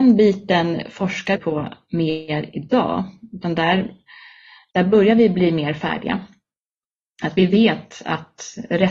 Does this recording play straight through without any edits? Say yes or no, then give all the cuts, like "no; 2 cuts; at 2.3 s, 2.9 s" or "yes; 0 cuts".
no; 1 cut; at 1.4 s